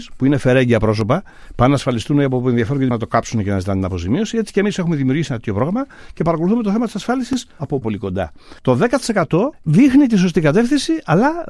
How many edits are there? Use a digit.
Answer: 4